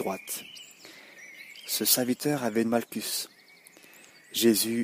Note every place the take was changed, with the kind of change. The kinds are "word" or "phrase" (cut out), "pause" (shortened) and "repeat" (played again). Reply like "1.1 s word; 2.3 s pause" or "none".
2.6 s word

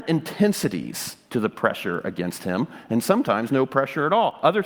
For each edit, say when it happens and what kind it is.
3.5 s word

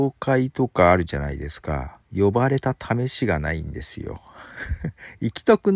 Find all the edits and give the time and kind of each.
2.0 s pause

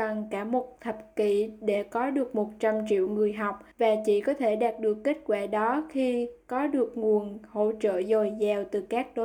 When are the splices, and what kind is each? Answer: 3.7 s pause

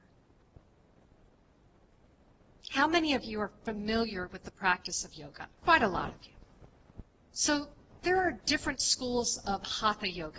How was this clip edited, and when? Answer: 5.6 s pause; 7.2 s pause

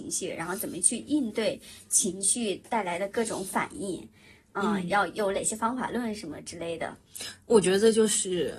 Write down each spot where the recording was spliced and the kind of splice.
7.4 s word

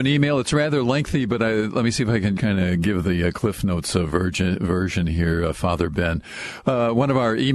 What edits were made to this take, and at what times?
2.4 s word

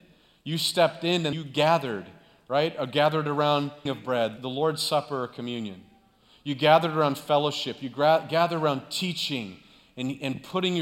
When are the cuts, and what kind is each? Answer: 1.3 s word; 3.9 s word; 4.4 s word

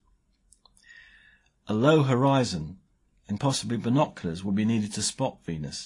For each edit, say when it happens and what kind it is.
3.4 s word

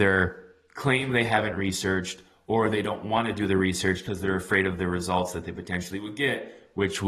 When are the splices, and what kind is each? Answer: none

